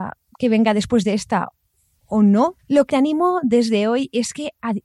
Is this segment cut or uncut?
cut